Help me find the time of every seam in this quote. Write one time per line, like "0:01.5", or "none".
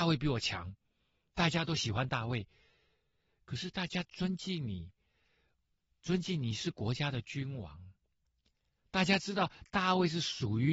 none